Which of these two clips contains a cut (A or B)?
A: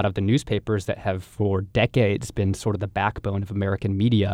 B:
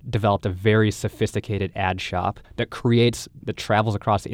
B